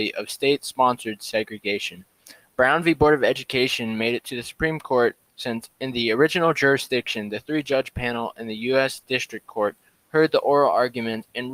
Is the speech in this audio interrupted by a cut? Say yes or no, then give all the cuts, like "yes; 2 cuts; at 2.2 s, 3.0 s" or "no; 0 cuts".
no; 0 cuts